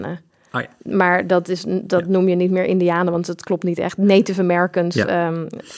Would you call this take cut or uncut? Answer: uncut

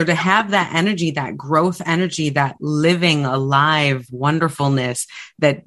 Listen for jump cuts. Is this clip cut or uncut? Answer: uncut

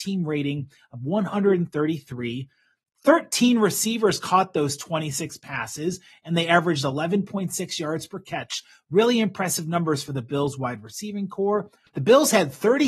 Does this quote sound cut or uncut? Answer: uncut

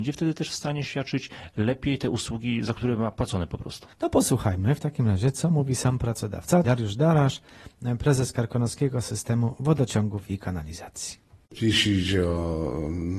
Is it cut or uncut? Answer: cut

